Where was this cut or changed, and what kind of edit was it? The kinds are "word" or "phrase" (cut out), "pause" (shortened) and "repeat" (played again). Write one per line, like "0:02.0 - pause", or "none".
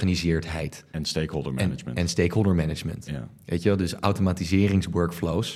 none